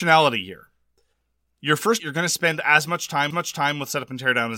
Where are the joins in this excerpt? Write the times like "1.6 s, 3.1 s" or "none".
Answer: 2.0 s, 3.3 s